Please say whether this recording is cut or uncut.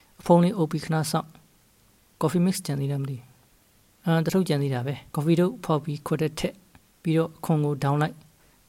cut